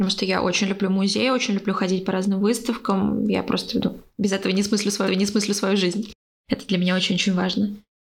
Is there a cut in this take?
yes; 1 cut; at 5.1 s

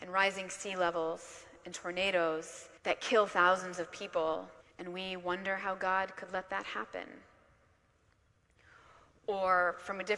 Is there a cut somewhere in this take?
yes; 2 cuts; at 2.8 s, 4.6 s

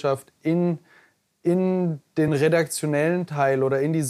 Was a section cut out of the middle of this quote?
no; 0 cuts

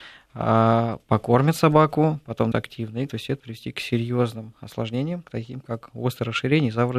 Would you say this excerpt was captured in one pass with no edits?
no; 3 cuts; at 2.5 s, 3.1 s, 3.4 s

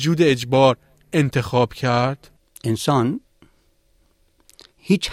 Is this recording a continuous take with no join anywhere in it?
yes; 0 cuts

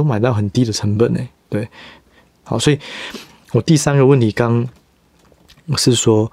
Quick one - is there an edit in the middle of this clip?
no; 0 cuts

